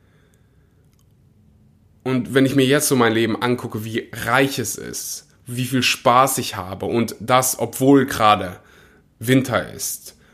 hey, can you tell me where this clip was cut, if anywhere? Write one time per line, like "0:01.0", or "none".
none